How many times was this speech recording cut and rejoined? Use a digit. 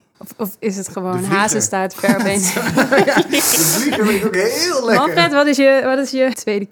0